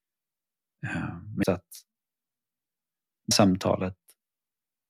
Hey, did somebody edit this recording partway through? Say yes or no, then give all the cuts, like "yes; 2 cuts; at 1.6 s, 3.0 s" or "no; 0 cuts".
yes; 2 cuts; at 1.4 s, 3.3 s